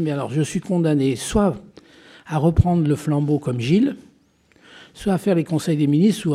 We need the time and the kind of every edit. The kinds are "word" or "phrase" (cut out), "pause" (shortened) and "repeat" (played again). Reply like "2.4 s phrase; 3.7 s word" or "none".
none